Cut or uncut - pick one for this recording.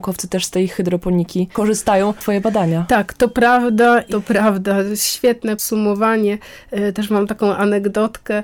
cut